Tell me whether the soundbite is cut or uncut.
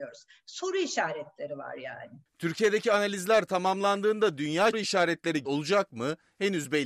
cut